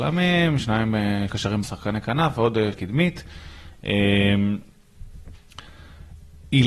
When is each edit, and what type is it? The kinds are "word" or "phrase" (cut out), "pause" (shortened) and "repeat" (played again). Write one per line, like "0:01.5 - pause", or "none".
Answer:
0:01.3 - word
0:01.6 - word
0:02.7 - word